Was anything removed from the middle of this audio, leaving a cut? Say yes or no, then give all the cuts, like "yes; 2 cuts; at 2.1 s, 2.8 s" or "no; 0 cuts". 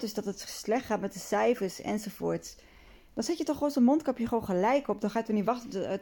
no; 0 cuts